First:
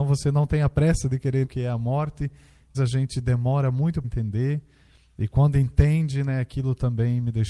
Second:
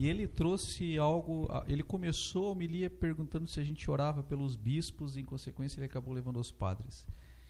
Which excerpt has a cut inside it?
first; 3 cuts; at 1.4 s, 2.7 s, 4.0 s

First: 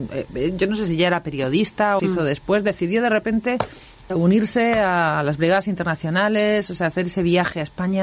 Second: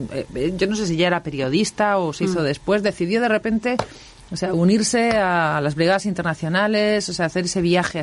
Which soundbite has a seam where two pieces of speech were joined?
first; 2 cuts; at 2.0 s, 4.1 s

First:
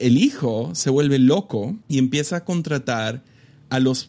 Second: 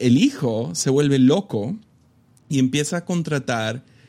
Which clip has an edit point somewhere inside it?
first; 1 cut; at 1.8 s

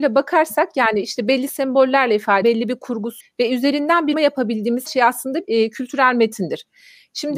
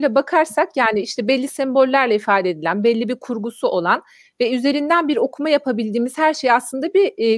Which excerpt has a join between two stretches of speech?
first; 5 cuts; at 2.4 s, 3.2 s, 4.1 s, 4.9 s, 5.4 s

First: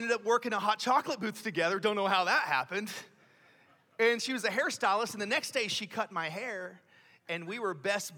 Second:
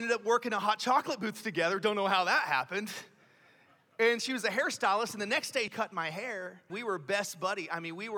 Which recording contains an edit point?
second; 2 cuts; at 5.7 s, 6.7 s

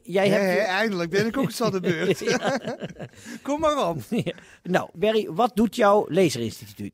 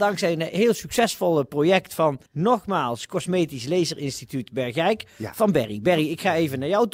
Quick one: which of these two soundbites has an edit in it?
second; 1 cut; at 2.3 s

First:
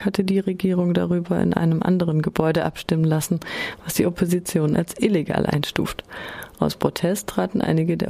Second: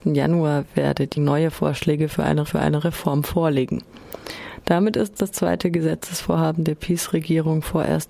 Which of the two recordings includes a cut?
second; 3 cuts; at 1.2 s, 2.5 s, 5.2 s

